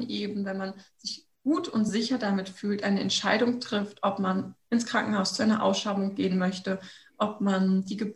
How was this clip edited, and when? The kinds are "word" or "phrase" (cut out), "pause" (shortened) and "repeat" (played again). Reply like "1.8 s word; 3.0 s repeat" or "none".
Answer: none